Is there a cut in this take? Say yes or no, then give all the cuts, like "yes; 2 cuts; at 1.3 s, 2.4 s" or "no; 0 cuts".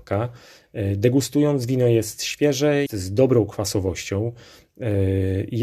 yes; 1 cut; at 2.9 s